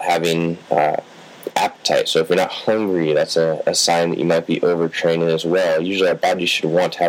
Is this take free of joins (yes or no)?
yes